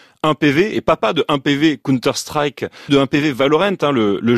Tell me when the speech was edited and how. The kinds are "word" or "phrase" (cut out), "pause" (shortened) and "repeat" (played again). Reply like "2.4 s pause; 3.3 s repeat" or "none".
2.9 s phrase